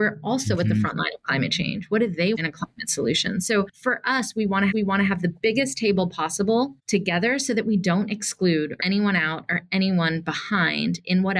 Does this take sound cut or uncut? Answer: cut